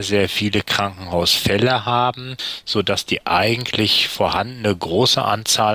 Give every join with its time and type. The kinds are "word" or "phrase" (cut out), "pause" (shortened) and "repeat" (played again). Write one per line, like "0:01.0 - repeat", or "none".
none